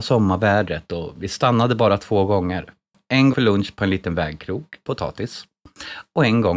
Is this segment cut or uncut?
cut